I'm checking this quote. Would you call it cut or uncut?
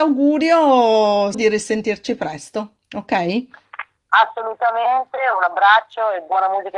cut